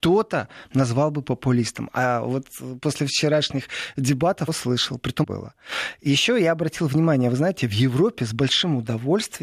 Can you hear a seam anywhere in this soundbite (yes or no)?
yes